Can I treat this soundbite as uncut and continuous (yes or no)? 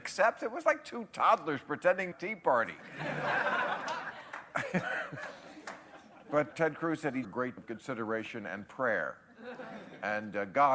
no